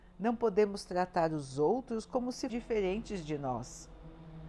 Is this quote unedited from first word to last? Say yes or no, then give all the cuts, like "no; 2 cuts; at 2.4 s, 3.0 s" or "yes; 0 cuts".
no; 1 cut; at 2.5 s